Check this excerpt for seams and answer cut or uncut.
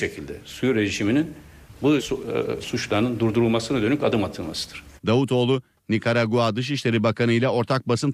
cut